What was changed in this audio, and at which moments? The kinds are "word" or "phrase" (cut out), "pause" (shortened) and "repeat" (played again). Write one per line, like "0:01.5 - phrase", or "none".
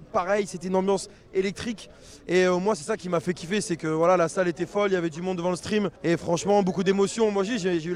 0:06.0 - pause